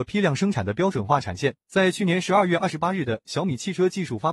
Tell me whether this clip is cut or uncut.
cut